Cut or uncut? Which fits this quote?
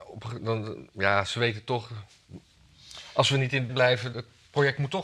cut